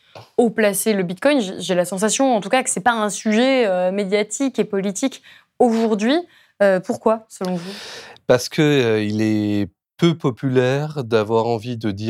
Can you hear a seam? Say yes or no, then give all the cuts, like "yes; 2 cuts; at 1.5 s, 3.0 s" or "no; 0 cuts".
no; 0 cuts